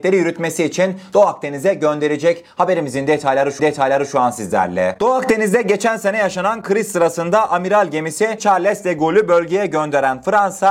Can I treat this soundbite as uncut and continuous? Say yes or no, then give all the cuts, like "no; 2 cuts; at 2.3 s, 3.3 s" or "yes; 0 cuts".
no; 1 cut; at 3.6 s